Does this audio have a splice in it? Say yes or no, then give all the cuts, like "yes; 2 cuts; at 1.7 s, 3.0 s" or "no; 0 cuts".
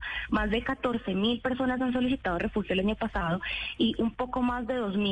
no; 0 cuts